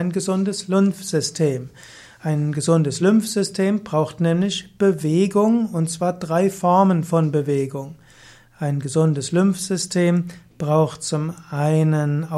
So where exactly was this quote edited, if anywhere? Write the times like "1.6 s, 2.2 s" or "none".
none